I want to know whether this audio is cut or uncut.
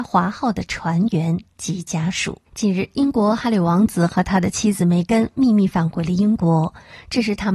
cut